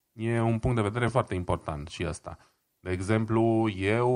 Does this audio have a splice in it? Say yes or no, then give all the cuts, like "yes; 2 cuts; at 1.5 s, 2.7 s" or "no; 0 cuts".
no; 0 cuts